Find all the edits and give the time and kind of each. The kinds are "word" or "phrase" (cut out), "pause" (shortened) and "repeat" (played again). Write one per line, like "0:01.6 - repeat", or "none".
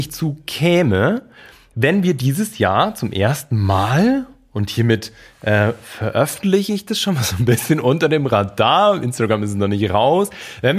none

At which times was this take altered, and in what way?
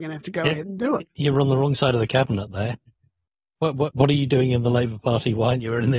none

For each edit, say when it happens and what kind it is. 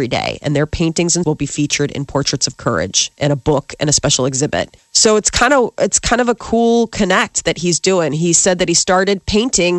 0:01.2 - word
0:04.8 - pause

